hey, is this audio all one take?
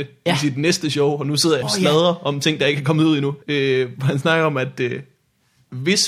no; 2 cuts; at 1.6 s, 3.4 s

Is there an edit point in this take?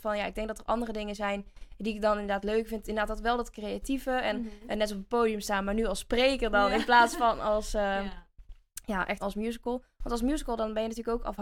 yes; 1 cut; at 9.2 s

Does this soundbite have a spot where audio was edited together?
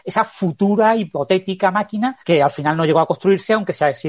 yes; 1 cut; at 2.2 s

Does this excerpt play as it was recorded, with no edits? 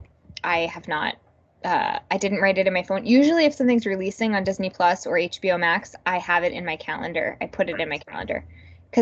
yes; 0 cuts

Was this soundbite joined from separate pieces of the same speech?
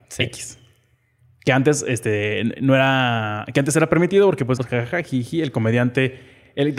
yes; 2 cuts; at 2.6 s, 4.6 s

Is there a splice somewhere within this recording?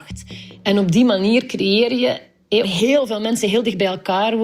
yes; 1 cut; at 2.6 s

